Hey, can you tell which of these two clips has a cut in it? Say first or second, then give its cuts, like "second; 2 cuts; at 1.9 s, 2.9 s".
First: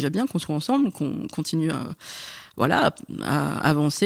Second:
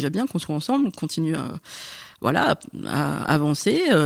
second; 1 cut; at 0.9 s